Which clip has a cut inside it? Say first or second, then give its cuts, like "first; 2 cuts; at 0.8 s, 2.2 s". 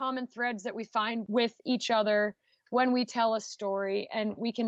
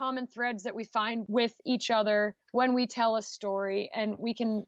second; 1 cut; at 2.4 s